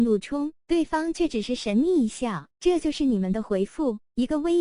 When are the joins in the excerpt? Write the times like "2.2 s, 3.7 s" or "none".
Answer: 2.5 s